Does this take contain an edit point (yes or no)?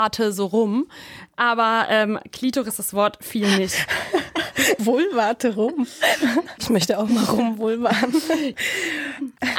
yes